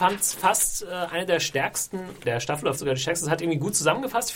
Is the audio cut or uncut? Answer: cut